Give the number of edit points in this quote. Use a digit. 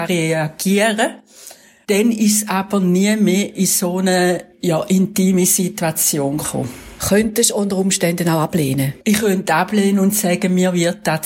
1